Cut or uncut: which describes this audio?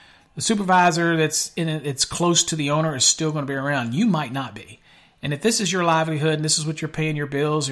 uncut